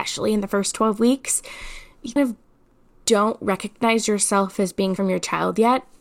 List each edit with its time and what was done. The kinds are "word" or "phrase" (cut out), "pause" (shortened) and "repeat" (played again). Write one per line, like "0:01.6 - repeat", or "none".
0:02.2 - word
0:05.0 - word